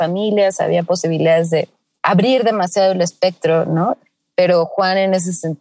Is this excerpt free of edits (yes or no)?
yes